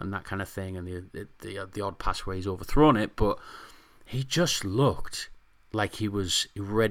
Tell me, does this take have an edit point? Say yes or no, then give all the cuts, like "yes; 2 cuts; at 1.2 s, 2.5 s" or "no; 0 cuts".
no; 0 cuts